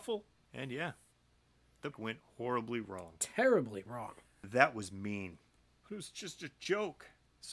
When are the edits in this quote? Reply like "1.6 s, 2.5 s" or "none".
1.9 s, 5.6 s

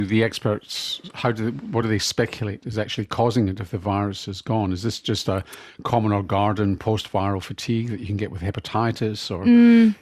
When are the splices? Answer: none

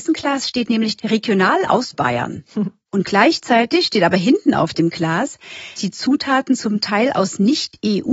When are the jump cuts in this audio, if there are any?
1.0 s, 1.9 s, 5.8 s

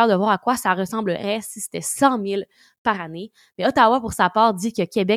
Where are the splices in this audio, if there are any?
none

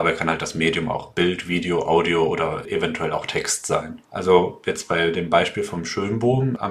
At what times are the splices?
4.0 s

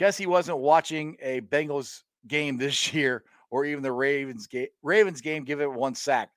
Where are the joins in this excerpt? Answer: none

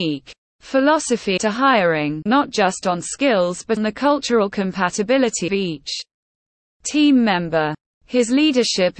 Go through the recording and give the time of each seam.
1.4 s, 2.3 s, 3.8 s, 5.5 s

